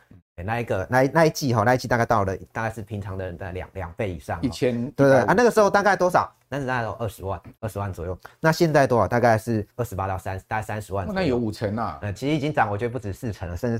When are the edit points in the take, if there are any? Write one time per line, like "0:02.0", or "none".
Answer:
0:07.6
0:09.7
0:12.1